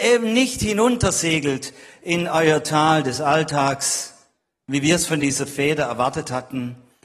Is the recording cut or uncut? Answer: uncut